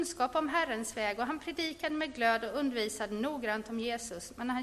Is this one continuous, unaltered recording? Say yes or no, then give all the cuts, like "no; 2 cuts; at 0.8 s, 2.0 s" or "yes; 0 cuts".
yes; 0 cuts